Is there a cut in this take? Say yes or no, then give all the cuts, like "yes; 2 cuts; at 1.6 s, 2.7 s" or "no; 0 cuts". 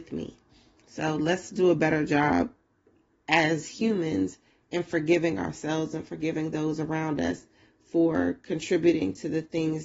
no; 0 cuts